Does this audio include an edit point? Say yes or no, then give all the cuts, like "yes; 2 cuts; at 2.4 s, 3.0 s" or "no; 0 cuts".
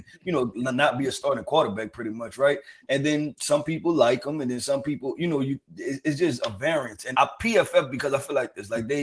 yes; 1 cut; at 7.1 s